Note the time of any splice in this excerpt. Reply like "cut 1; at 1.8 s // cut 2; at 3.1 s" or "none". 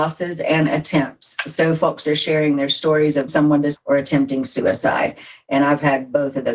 cut 1; at 3.3 s // cut 2; at 3.7 s